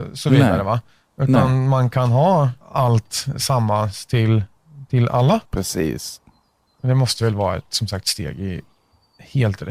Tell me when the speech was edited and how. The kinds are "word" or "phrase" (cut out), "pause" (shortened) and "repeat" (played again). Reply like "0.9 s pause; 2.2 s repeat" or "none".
2.6 s pause; 5.5 s pause